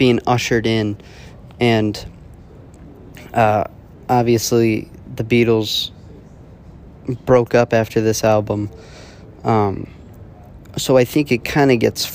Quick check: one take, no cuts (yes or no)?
yes